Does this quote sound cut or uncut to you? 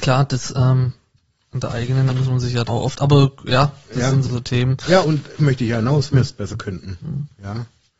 cut